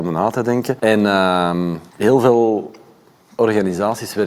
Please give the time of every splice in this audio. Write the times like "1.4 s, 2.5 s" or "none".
none